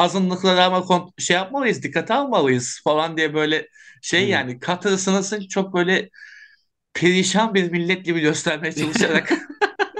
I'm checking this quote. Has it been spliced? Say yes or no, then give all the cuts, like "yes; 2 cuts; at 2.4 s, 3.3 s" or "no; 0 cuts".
no; 0 cuts